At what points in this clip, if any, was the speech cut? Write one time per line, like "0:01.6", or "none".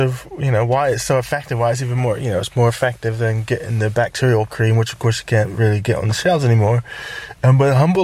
none